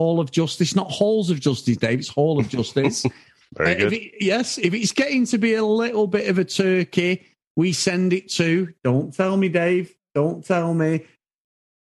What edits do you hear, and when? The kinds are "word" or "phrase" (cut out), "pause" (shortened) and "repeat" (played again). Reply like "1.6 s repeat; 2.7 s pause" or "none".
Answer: none